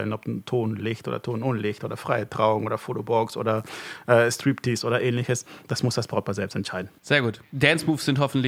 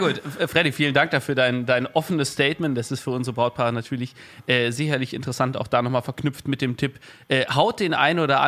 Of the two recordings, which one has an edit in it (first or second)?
first